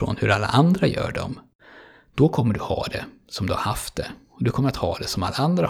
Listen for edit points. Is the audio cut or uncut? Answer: uncut